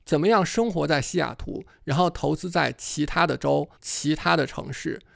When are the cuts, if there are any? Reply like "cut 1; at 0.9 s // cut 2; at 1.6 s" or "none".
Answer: cut 1; at 3.8 s